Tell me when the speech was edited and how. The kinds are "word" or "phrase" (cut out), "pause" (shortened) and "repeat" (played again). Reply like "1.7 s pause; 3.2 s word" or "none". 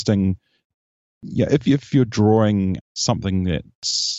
2.8 s word

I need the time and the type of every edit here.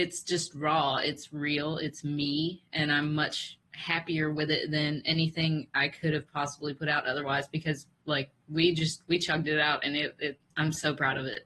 7.9 s pause; 10.5 s pause

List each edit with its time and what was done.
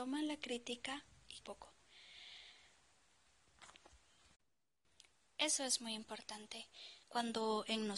1.4 s phrase; 7.0 s pause

